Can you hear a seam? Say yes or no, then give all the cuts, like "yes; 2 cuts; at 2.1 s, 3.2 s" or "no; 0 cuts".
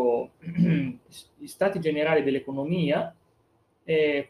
no; 0 cuts